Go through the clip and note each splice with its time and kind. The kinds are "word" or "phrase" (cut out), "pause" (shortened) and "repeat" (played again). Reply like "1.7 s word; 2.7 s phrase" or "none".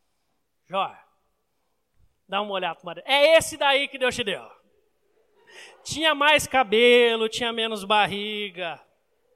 none